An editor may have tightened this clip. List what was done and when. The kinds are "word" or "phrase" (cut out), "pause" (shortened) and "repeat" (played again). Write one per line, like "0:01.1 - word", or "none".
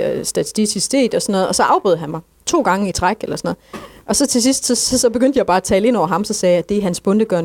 none